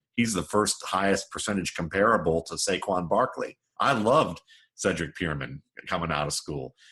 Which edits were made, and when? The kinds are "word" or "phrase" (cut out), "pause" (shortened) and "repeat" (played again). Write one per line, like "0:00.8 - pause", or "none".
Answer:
none